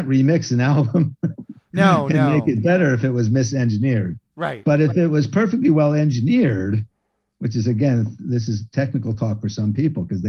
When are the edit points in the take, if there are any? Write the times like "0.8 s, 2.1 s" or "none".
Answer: none